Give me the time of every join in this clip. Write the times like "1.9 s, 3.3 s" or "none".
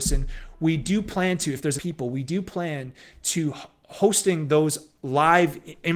1.8 s